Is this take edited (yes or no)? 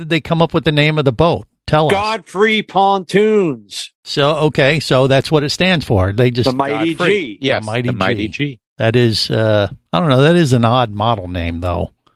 no